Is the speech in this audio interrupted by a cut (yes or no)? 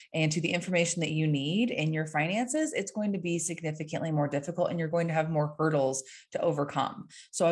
no